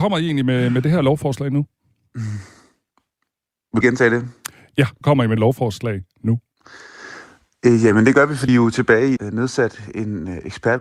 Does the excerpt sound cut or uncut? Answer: cut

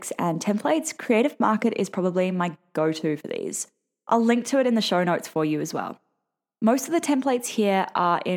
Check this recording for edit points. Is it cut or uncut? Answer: uncut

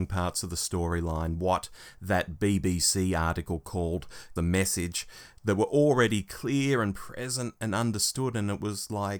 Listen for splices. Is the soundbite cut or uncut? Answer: cut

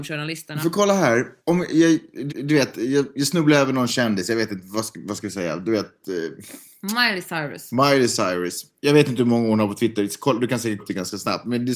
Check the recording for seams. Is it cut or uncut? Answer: cut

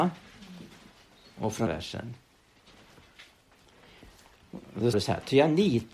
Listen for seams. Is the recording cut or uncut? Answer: cut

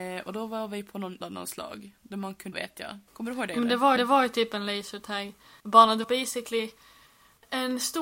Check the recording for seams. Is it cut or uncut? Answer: cut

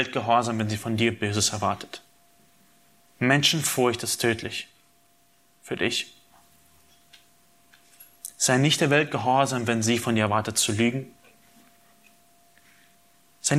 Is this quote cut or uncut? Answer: uncut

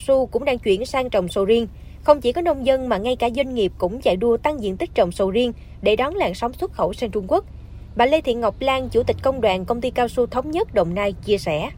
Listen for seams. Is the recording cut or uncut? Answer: uncut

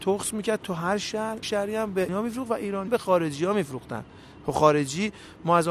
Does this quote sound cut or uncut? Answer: cut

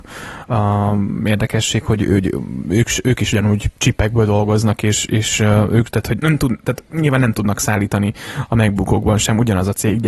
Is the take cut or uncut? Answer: cut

